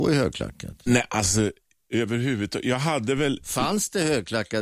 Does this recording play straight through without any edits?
yes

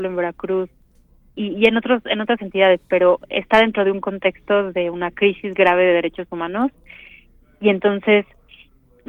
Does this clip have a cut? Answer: no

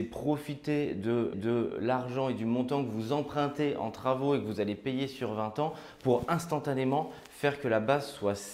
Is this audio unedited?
no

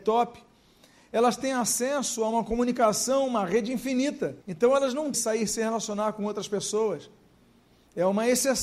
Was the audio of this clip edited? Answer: yes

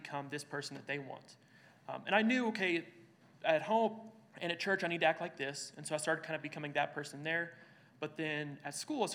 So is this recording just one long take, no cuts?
yes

